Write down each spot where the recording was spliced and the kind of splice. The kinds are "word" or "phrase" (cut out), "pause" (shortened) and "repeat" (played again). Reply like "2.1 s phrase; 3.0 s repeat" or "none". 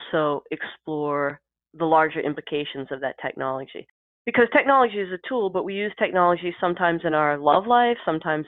none